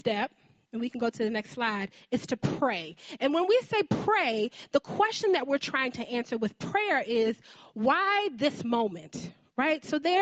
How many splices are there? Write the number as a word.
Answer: zero